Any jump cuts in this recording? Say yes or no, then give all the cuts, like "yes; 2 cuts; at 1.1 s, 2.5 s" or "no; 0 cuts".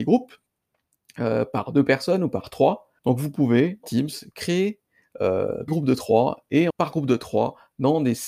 yes; 4 cuts; at 3.0 s, 3.8 s, 5.7 s, 6.7 s